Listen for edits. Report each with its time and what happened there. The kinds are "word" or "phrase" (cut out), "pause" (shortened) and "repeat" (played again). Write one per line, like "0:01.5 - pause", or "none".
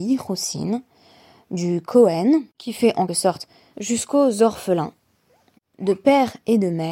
0:02.5 - pause
0:03.1 - word
0:03.7 - phrase